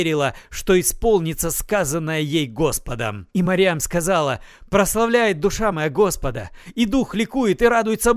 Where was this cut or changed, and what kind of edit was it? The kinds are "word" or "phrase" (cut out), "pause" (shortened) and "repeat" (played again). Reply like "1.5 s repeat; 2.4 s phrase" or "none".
none